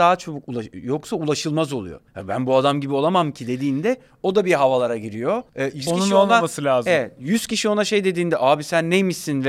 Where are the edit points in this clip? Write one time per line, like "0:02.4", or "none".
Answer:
0:02.1
0:05.5
0:05.9

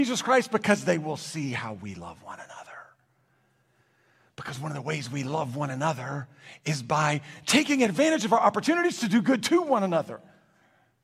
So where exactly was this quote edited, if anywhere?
none

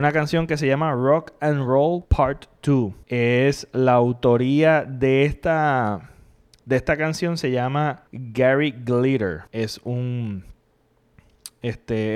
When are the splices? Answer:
0:02.0
0:03.0
0:08.1
0:09.5

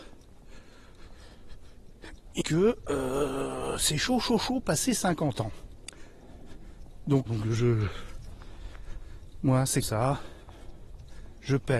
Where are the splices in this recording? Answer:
0:02.4
0:04.4
0:07.3
0:09.8

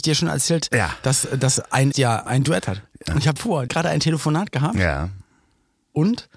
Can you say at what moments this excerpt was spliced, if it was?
0:01.9
0:02.3
0:02.6
0:03.4
0:03.7

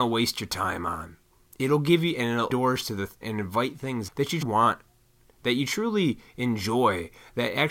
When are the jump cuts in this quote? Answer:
0:02.5
0:03.2
0:04.1
0:04.4

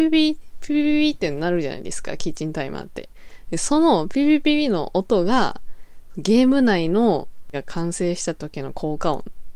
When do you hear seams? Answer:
0:07.5

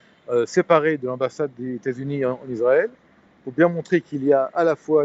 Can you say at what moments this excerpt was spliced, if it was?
none

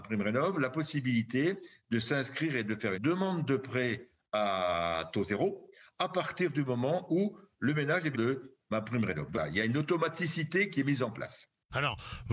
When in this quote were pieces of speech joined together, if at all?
0:02.9
0:08.1
0:09.3

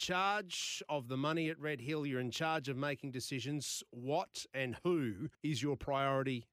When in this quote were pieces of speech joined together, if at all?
0:05.3

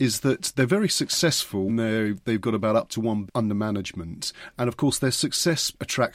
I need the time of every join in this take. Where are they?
0:01.7
0:03.3

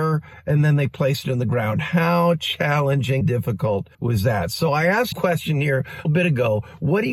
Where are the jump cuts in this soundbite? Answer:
0:03.2
0:03.9
0:05.1
0:06.0

